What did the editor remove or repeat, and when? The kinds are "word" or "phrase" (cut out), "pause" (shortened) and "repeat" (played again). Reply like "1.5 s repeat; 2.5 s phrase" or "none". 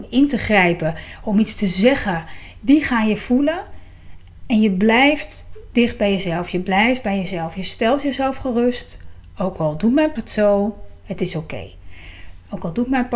10.2 s word

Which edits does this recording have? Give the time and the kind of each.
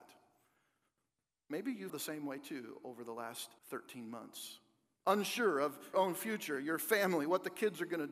1.9 s word; 3.6 s pause; 5.9 s word

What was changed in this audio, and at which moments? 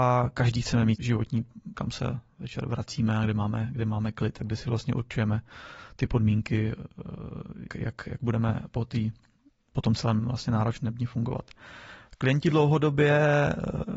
1.0 s word; 1.7 s word; 7.7 s word

